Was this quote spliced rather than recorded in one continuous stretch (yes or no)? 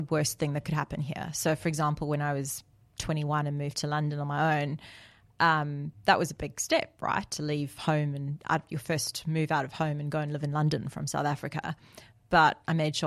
no